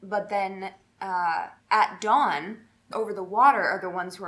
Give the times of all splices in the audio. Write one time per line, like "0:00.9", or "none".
0:01.6
0:02.9